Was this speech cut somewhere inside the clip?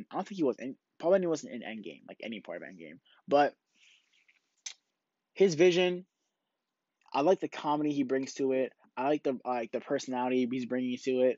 no; 0 cuts

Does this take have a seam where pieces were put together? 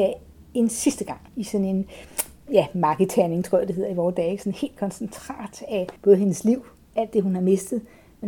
yes; 2 cuts; at 1.3 s, 6.0 s

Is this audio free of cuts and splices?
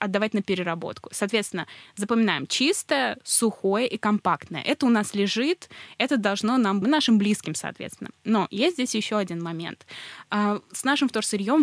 no; 1 cut; at 6.8 s

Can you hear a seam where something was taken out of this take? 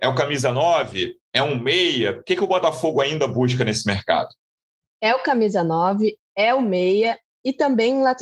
yes; 1 cut; at 4.8 s

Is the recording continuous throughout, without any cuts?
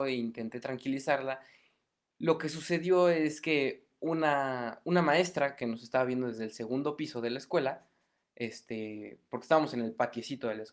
yes; 0 cuts

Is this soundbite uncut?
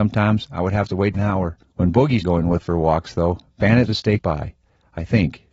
no; 6 cuts; at 1.1 s, 1.6 s, 2.2 s, 2.6 s, 3.9 s, 4.2 s

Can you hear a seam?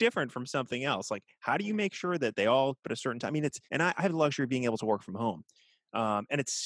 yes; 2 cuts; at 2.8 s, 3.6 s

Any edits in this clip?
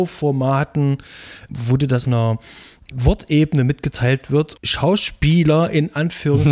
yes; 4 cuts; at 1.5 s, 2.0 s, 2.9 s, 4.6 s

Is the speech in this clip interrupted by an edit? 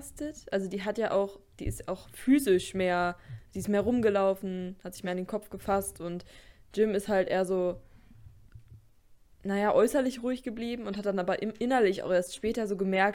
no; 0 cuts

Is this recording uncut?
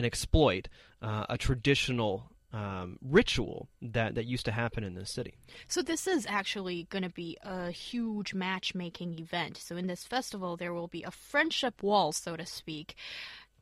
yes; 0 cuts

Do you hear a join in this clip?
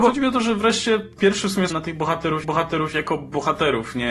yes; 3 cuts; at 1.2 s, 1.7 s, 2.4 s

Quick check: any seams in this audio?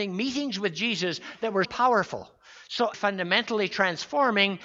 yes; 2 cuts; at 1.6 s, 2.9 s

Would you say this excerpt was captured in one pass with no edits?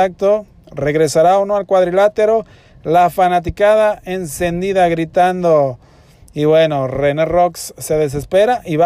yes; 0 cuts

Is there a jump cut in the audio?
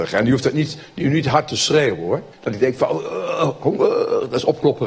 yes; 1 cut; at 2.3 s

